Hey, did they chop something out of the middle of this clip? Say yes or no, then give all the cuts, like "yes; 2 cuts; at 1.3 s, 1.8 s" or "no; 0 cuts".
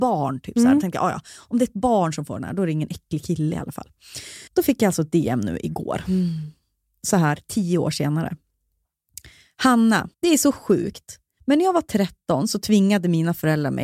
yes; 2 cuts; at 4.5 s, 10.1 s